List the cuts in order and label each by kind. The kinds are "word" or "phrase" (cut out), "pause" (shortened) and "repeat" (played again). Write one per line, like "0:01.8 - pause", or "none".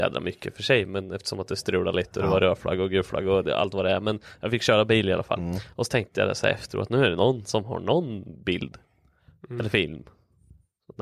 none